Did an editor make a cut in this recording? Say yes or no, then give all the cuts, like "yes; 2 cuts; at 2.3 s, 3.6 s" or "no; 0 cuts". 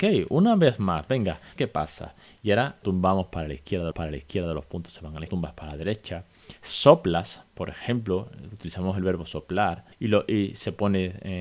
yes; 5 cuts; at 1.6 s, 2.8 s, 3.9 s, 5.3 s, 9.9 s